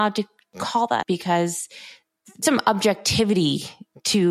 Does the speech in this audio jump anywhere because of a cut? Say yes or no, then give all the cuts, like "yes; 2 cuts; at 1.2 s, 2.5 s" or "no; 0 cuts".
yes; 2 cuts; at 1.0 s, 2.4 s